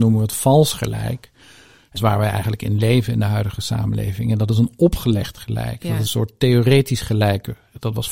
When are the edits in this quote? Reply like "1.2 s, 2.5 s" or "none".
2.0 s, 6.1 s